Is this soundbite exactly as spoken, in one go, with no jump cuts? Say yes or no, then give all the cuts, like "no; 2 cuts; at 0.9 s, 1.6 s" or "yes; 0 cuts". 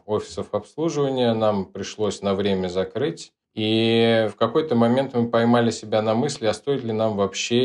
no; 1 cut; at 3.4 s